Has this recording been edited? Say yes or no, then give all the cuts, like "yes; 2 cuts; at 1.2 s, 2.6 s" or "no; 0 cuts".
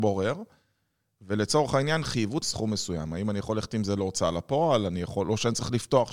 yes; 1 cut; at 2.4 s